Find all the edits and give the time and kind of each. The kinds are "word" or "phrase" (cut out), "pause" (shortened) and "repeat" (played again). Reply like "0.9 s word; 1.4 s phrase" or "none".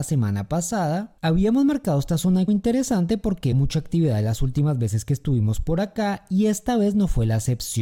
2.5 s word; 3.5 s word